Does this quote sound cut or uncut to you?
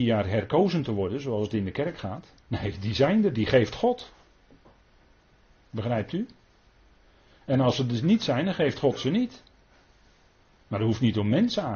cut